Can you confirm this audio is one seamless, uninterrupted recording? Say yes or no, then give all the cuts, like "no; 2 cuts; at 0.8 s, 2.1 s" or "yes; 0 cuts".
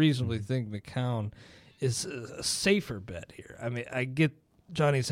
yes; 0 cuts